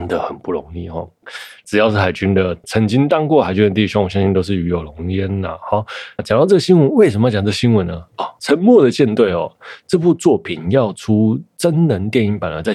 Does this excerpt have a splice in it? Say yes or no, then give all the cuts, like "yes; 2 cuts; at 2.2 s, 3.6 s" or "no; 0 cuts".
yes; 1 cut; at 6.2 s